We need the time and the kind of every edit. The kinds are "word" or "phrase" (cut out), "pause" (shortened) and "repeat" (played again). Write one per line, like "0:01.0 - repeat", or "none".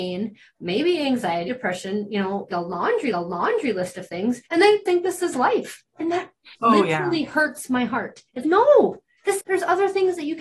0:01.5 - word
0:02.5 - word
0:03.1 - repeat
0:04.5 - pause
0:04.9 - word
0:06.5 - pause
0:08.4 - word
0:09.4 - phrase